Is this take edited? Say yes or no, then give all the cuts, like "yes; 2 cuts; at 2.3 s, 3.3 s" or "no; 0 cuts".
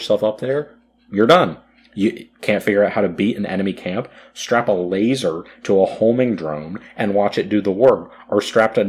no; 0 cuts